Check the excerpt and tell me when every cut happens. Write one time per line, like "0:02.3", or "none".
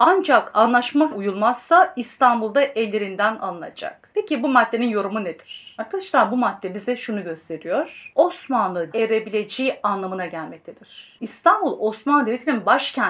0:01.1
0:08.9

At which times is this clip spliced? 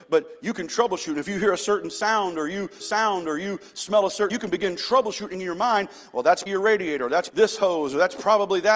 0:02.8
0:04.3
0:06.5
0:07.3

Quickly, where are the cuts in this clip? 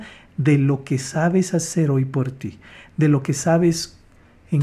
none

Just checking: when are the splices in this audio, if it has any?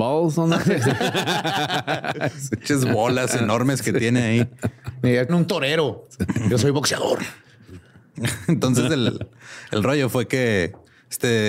0:05.3

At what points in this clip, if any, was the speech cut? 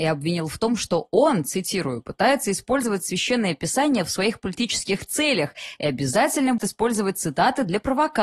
0:06.6

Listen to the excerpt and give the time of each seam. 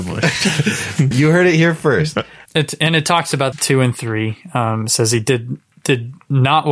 0:01.1
0:02.5
0:03.5

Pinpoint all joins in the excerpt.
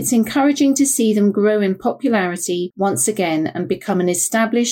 none

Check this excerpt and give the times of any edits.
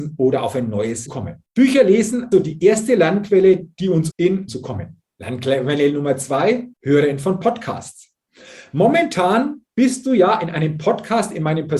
0:01.1
0:01.5
0:02.3
0:04.1
0:04.5
0:05.1
0:06.7

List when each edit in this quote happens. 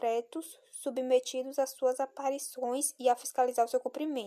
none

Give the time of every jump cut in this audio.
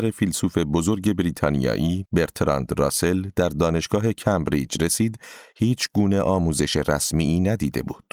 none

